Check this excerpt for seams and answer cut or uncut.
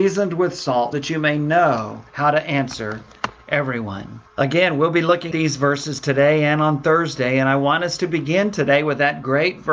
cut